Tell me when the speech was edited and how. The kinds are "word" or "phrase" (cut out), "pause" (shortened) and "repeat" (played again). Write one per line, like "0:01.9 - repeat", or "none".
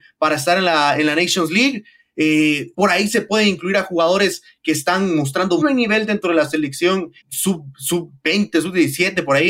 0:02.7 - pause
0:05.6 - word
0:07.2 - word